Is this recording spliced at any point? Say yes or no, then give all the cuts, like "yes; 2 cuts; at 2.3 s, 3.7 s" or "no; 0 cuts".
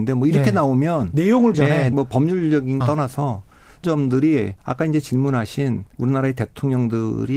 yes; 6 cuts; at 1.5 s, 1.9 s, 2.8 s, 3.8 s, 4.6 s, 5.9 s